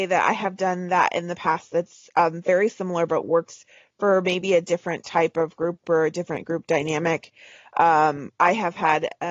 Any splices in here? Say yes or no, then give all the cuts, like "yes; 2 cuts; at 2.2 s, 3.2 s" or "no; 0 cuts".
no; 0 cuts